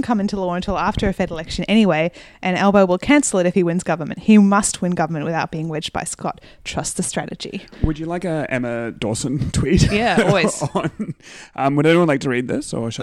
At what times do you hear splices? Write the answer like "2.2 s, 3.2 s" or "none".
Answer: none